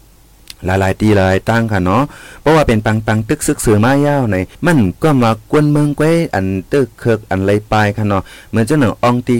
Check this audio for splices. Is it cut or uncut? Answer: cut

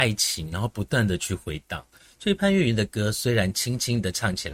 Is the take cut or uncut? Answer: uncut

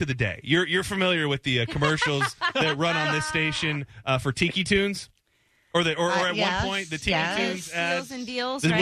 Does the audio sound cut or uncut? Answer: uncut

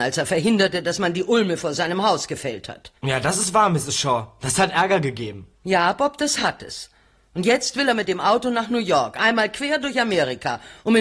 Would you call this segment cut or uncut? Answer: cut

